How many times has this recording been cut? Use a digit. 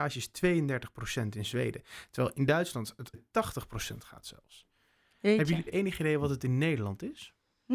2